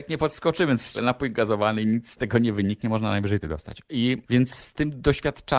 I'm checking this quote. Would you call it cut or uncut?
cut